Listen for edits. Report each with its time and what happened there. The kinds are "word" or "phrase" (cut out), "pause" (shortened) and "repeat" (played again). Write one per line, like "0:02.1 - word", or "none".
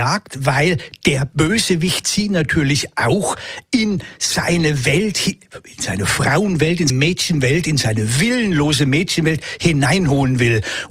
0:06.9 - word